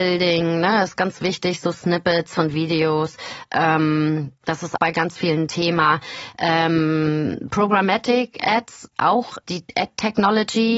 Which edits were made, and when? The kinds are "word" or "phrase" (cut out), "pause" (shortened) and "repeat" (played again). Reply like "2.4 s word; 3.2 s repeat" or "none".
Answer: 1.0 s word; 4.8 s word